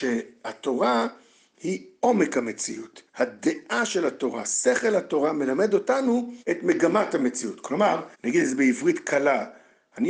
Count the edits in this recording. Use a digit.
3